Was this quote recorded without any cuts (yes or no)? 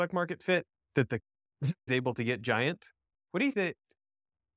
no